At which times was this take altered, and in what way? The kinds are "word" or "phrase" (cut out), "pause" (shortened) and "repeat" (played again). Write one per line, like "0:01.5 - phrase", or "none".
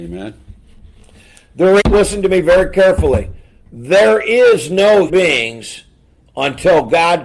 0:01.8 - phrase
0:05.1 - word